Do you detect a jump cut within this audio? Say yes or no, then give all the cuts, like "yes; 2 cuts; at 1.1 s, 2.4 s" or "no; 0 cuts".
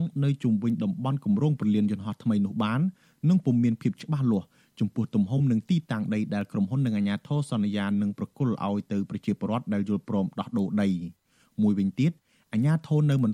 no; 0 cuts